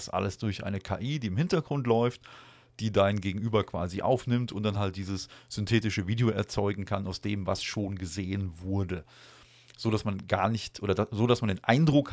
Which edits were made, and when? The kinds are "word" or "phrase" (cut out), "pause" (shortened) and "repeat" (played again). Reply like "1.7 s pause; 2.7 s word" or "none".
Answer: none